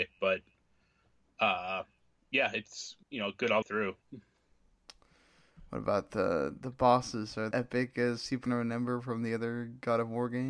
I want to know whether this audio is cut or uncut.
cut